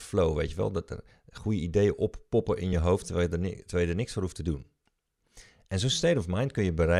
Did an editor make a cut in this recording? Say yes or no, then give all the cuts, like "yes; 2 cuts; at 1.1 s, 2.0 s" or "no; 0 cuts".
no; 0 cuts